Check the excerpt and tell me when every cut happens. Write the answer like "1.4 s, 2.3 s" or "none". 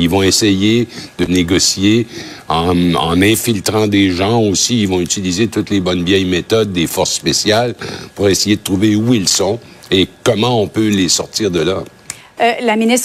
none